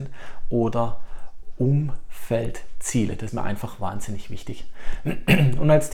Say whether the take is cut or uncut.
cut